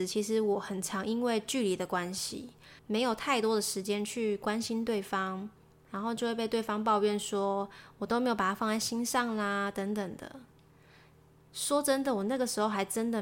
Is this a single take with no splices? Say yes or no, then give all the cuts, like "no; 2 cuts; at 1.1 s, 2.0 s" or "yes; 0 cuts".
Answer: no; 1 cut; at 2.8 s